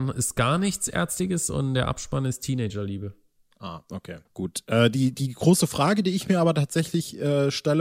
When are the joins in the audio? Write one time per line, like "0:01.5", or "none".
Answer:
0:04.2